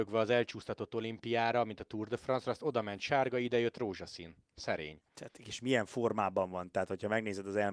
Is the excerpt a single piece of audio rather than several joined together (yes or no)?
yes